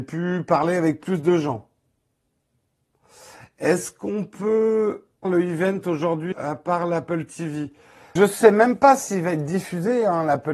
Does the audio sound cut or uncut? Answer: cut